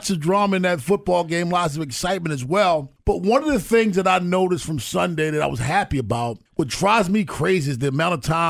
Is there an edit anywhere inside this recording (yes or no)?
yes